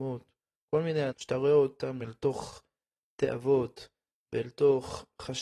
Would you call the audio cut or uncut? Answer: cut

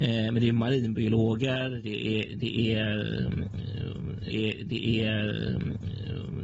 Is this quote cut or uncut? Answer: cut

